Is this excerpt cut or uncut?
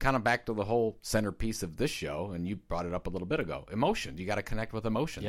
uncut